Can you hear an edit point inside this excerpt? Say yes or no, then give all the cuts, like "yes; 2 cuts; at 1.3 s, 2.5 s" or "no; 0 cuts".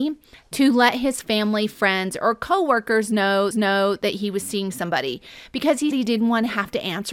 yes; 2 cuts; at 3.5 s, 5.9 s